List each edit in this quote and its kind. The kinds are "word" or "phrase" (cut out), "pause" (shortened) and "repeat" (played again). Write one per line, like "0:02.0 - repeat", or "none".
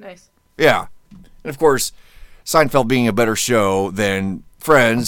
0:01.0 - pause